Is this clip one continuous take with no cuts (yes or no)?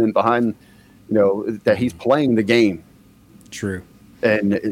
yes